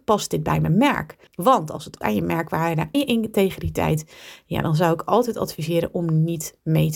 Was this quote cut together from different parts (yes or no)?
yes